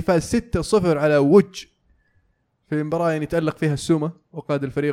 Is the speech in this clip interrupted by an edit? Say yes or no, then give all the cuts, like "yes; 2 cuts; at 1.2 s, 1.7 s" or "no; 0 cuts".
no; 0 cuts